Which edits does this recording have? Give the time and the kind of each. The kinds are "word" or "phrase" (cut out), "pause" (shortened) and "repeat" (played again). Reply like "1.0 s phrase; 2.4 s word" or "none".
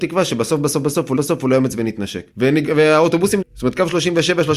1.2 s repeat; 2.3 s pause; 3.4 s word